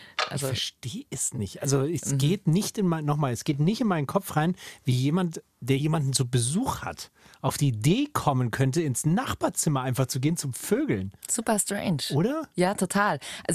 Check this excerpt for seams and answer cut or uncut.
uncut